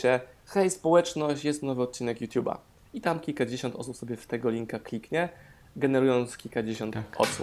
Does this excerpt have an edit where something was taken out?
no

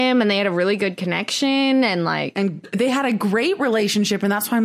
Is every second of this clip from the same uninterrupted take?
yes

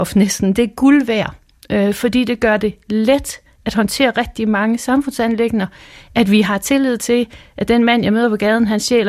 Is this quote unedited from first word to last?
yes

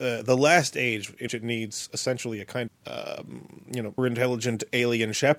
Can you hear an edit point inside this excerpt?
yes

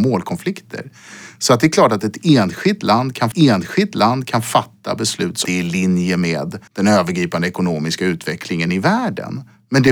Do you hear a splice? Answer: yes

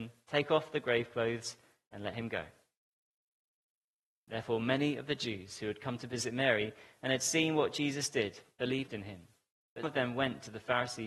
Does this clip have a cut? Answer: yes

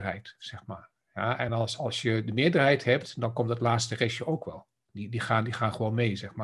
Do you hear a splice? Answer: no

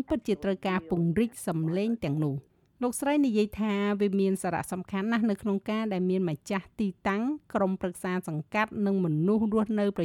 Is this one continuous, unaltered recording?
no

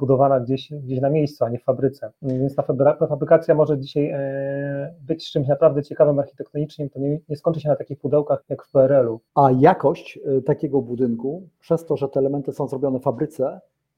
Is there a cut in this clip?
yes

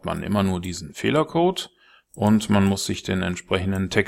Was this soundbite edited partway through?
no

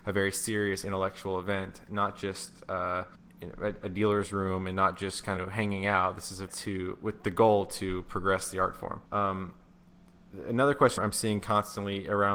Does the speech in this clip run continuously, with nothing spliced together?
no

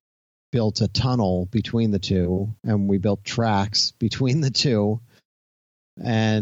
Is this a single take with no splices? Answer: no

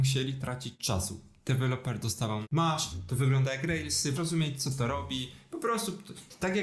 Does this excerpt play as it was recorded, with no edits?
no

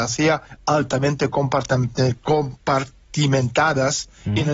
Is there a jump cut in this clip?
no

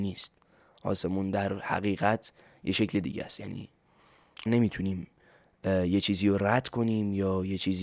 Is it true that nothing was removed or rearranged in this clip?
no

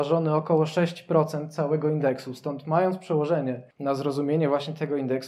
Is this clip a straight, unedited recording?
no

